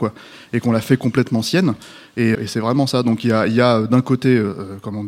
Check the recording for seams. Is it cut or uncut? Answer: cut